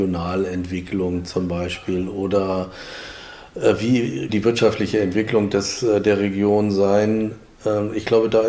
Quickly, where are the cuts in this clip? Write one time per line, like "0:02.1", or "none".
0:04.3